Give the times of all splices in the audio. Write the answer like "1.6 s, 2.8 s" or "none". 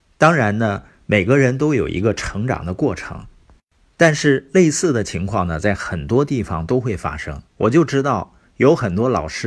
7.5 s

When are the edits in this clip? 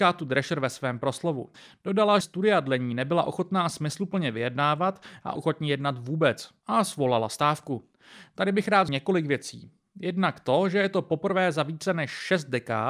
2.2 s, 5.4 s, 8.9 s

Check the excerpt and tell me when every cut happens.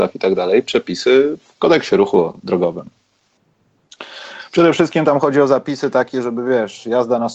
none

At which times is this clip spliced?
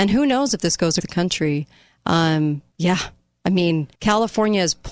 1.0 s, 2.7 s, 3.9 s

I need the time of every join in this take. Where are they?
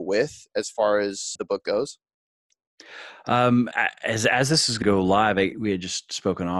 1.3 s, 3.7 s, 4.8 s, 5.5 s

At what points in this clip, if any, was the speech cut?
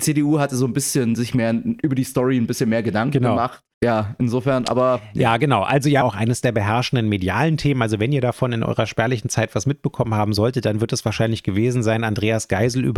3.7 s, 6.0 s

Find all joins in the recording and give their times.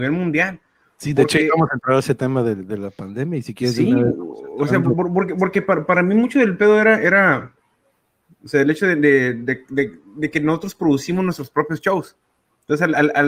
none

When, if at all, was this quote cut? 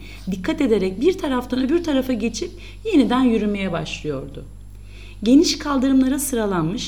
none

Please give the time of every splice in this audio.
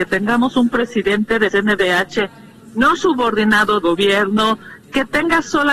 1.5 s, 3.8 s

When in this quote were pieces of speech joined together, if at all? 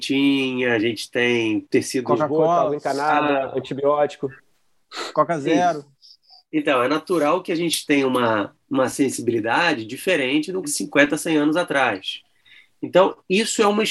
10.6 s

